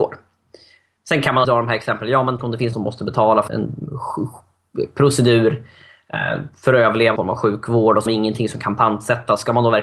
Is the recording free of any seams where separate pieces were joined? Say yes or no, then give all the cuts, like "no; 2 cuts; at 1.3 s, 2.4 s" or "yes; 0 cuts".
no; 6 cuts; at 1.4 s, 2.4 s, 2.7 s, 3.5 s, 7.2 s, 8.1 s